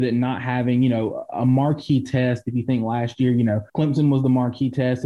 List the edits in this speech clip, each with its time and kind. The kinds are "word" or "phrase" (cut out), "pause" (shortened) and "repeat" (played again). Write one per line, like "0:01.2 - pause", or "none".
0:03.7 - pause